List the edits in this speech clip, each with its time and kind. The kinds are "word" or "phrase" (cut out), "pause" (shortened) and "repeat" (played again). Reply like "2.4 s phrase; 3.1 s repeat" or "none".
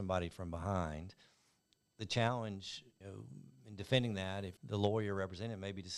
3.0 s word; 4.6 s word